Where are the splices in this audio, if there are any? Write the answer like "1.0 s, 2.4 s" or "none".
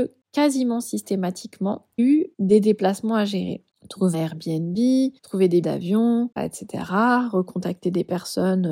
2.0 s, 2.3 s, 4.1 s, 5.2 s, 5.6 s, 6.4 s